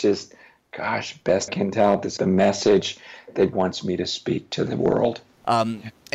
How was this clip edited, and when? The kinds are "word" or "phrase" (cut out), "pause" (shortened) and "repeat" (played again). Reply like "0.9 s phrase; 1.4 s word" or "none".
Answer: 1.5 s word; 2.2 s word; 3.5 s word